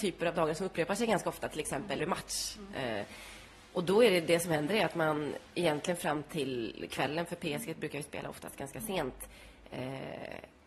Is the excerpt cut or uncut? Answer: cut